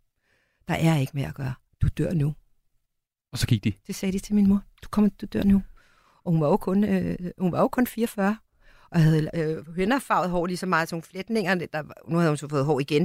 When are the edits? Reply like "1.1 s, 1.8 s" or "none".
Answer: none